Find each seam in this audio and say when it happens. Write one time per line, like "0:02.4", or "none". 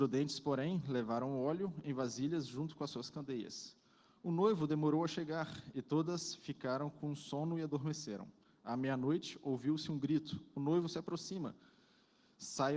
none